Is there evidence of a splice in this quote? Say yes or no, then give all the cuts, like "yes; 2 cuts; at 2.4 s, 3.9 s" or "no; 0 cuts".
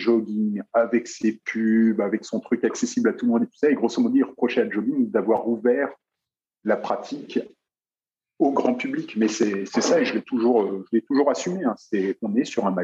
no; 0 cuts